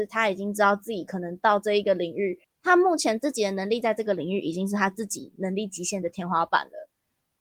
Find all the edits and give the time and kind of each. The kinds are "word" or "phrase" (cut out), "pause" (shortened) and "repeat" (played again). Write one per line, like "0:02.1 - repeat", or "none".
0:02.4 - pause